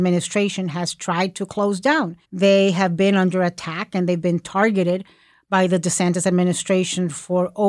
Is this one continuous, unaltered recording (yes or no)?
no